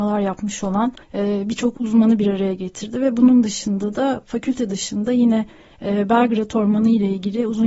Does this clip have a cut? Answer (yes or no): yes